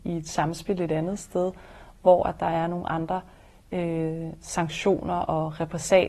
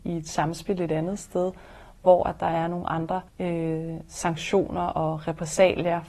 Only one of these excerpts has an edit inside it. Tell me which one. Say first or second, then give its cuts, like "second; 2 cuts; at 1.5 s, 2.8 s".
second; 1 cut; at 3.3 s